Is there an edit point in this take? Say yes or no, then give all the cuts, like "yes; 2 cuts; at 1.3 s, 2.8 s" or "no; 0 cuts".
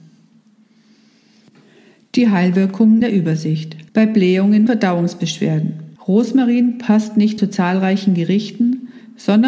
yes; 5 cuts; at 3.0 s, 3.9 s, 4.7 s, 6.0 s, 7.4 s